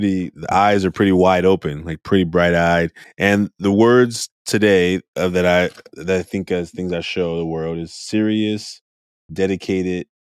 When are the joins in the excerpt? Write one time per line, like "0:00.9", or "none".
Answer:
0:03.0
0:04.4

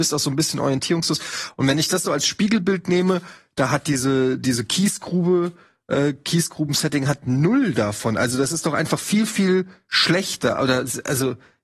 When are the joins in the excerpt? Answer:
none

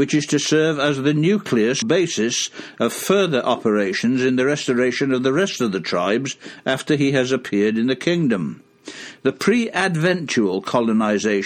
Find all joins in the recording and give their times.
0:01.8

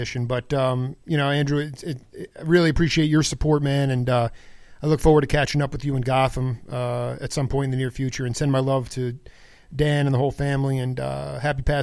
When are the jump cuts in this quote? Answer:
none

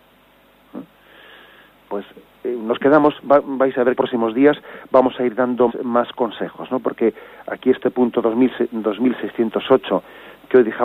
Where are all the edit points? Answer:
0:01.9
0:04.0
0:05.7

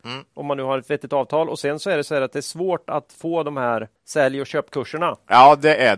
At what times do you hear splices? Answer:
0:04.0

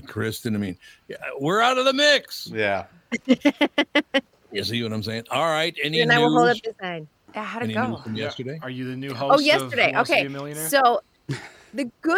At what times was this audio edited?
none

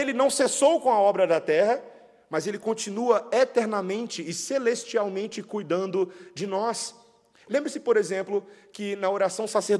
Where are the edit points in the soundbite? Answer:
none

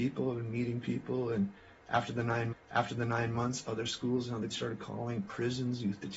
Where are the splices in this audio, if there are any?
0:02.5
0:04.5

